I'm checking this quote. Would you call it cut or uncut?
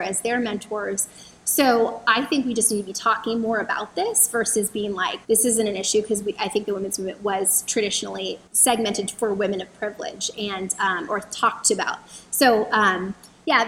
cut